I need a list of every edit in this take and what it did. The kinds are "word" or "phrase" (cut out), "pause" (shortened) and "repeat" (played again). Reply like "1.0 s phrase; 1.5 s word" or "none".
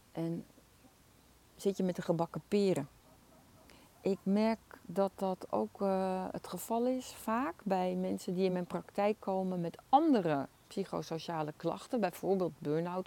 none